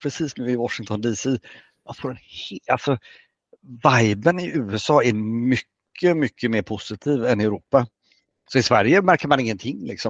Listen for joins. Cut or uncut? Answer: uncut